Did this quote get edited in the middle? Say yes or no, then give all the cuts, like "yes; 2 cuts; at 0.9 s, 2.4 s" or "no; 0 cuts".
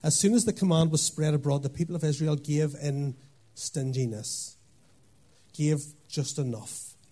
no; 0 cuts